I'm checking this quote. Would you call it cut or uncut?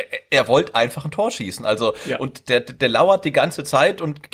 uncut